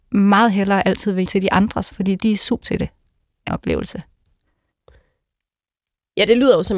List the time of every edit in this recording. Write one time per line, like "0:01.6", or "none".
0:01.3
0:01.9
0:02.6
0:03.5

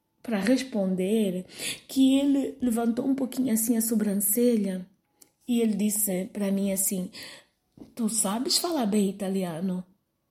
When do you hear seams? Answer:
none

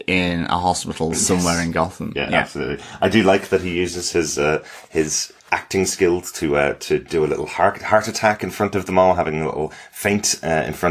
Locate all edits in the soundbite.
0:05.4

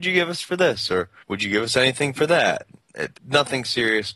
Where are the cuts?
0:03.1

